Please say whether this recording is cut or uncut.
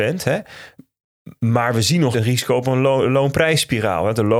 cut